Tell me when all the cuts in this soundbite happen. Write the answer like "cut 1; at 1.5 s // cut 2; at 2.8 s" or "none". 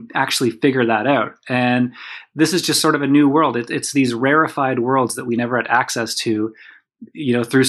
none